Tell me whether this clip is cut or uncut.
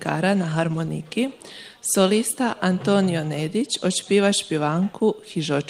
uncut